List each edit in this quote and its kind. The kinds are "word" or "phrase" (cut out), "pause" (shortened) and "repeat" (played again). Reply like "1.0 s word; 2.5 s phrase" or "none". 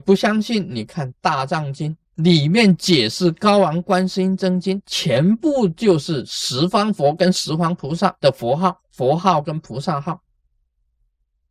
2.1 s pause; 8.2 s pause; 8.8 s pause

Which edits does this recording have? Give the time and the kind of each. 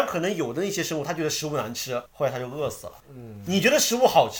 2.1 s pause; 3.0 s pause

